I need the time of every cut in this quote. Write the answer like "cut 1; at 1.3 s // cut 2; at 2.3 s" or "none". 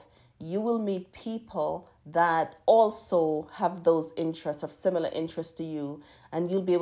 none